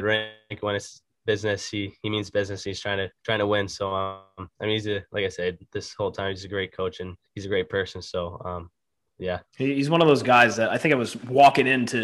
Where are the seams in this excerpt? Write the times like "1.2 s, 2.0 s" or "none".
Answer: 3.2 s, 7.3 s, 9.5 s